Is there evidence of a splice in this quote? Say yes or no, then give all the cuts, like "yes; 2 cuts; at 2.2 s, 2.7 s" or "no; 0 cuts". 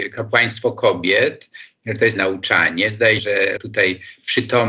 yes; 3 cuts; at 2.1 s, 3.2 s, 3.6 s